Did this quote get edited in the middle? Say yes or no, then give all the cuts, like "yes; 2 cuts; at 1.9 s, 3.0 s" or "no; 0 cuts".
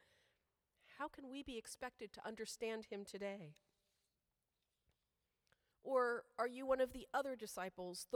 no; 0 cuts